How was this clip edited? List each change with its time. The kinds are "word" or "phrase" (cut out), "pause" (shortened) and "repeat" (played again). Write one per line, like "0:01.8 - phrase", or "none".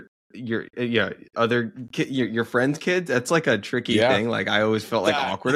none